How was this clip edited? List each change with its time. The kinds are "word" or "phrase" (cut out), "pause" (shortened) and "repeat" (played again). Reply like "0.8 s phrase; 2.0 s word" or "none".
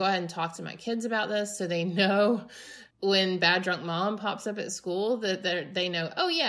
2.9 s pause

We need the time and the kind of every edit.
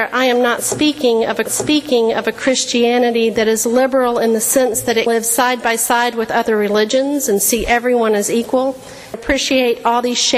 1.5 s repeat; 5.1 s word; 9.1 s word

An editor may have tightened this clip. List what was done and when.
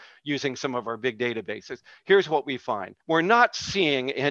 3.0 s pause

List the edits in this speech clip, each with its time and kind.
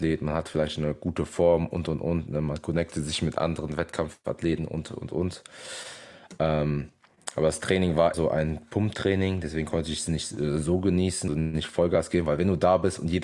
8.1 s word; 11.3 s word

